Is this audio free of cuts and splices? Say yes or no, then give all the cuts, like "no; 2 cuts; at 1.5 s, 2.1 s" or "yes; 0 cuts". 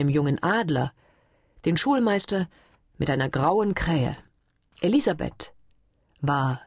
yes; 0 cuts